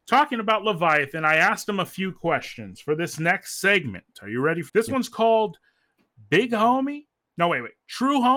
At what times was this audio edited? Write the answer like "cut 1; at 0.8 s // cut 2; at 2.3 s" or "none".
cut 1; at 4.7 s